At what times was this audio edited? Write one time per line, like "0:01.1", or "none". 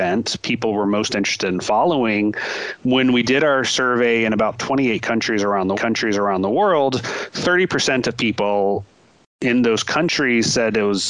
0:05.7